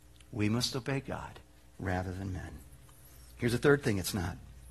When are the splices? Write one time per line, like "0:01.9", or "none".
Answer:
none